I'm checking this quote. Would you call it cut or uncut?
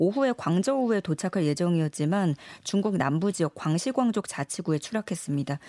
uncut